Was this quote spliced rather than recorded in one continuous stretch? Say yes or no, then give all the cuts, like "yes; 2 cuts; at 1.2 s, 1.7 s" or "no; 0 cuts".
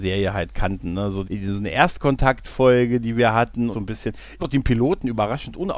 yes; 3 cuts; at 1.2 s, 3.7 s, 4.4 s